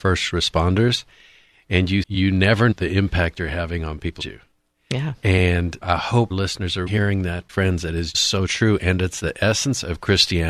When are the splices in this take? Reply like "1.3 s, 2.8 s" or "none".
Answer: 2.0 s, 2.7 s, 4.2 s, 5.8 s, 6.3 s, 6.9 s, 7.5 s, 8.1 s